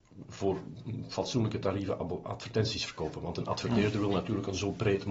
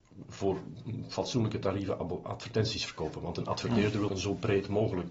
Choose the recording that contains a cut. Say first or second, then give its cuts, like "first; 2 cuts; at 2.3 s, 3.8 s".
second; 1 cut; at 4.1 s